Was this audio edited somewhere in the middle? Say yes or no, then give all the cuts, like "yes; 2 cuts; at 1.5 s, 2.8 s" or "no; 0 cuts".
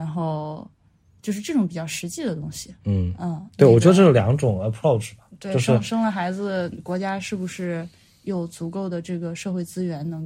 yes; 1 cut; at 2.8 s